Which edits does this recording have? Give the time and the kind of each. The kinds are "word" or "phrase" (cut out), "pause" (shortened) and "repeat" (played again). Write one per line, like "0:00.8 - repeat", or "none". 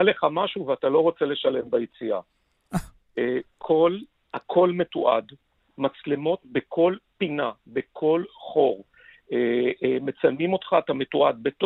0:03.6 - word